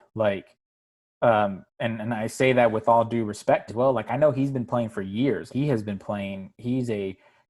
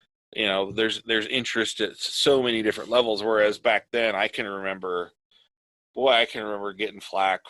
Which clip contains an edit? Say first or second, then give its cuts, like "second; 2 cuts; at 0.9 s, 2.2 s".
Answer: first; 2 cuts; at 3.7 s, 5.5 s